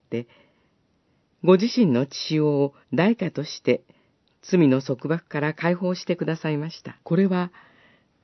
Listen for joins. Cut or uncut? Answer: cut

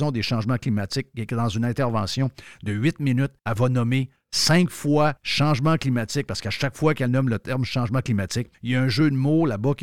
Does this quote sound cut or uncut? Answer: cut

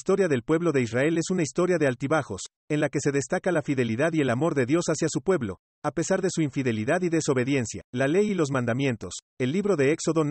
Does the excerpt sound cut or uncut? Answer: cut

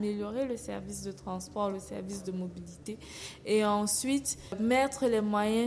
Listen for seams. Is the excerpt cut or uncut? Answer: uncut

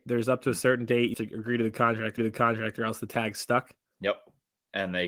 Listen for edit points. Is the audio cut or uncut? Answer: cut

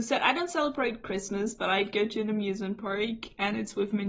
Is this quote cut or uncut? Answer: uncut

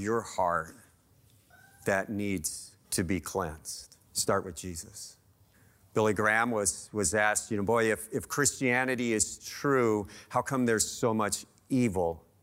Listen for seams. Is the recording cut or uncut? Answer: cut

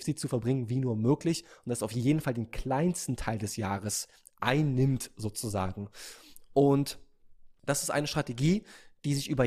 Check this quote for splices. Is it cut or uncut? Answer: uncut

